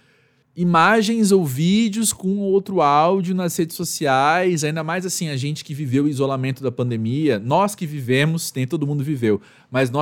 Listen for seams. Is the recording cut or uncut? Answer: uncut